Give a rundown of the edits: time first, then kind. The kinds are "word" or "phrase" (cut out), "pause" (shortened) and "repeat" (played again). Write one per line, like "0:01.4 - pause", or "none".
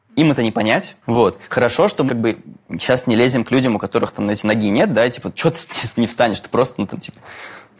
0:01.0 - pause
0:02.1 - word